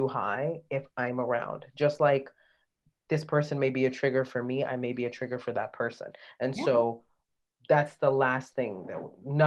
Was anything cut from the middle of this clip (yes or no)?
no